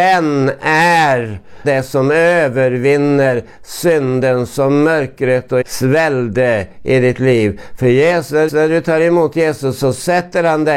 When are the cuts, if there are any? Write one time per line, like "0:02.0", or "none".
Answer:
0:01.6
0:05.6
0:08.5